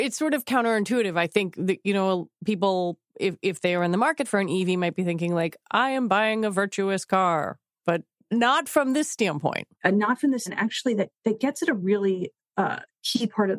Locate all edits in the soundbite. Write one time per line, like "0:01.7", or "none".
0:03.1
0:09.7
0:10.5

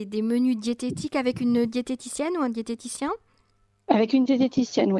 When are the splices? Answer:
none

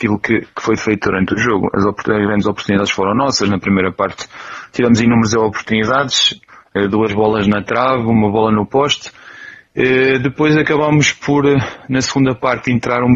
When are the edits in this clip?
none

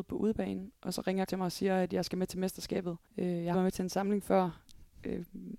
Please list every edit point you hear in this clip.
0:01.3
0:03.1
0:03.5

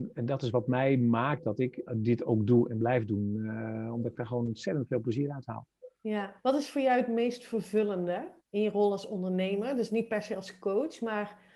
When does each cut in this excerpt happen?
0:01.9
0:06.4
0:08.4

